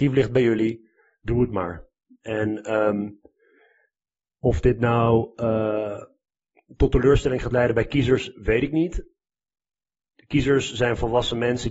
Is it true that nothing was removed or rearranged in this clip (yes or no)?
yes